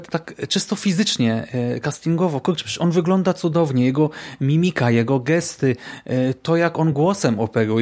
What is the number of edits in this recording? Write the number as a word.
zero